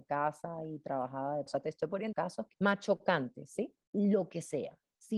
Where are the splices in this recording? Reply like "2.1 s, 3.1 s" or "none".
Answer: 1.5 s, 2.1 s, 2.5 s